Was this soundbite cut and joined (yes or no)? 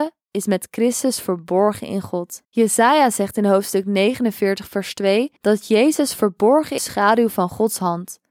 yes